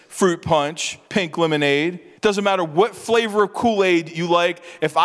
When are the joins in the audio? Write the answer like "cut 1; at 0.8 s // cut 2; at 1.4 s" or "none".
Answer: cut 1; at 1.1 s // cut 2; at 2.2 s